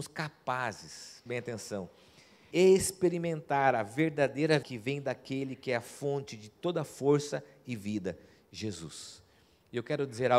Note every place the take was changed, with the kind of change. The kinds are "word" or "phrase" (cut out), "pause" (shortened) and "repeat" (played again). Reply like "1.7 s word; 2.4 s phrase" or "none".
1.3 s word; 2.5 s word; 4.6 s word